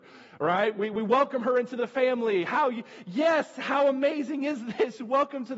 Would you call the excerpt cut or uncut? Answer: uncut